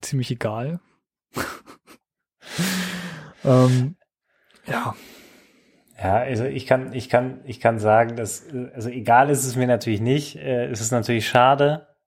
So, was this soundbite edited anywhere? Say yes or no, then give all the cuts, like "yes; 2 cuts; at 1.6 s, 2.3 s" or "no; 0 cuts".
no; 0 cuts